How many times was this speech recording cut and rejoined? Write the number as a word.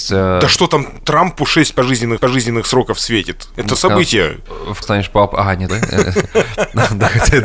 four